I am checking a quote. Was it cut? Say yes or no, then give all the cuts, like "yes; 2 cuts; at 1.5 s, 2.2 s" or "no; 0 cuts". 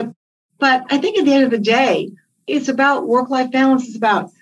no; 0 cuts